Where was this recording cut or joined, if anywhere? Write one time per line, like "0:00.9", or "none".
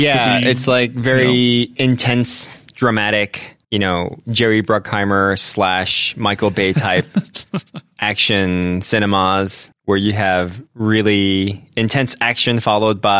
0:03.6
0:09.7
0:10.7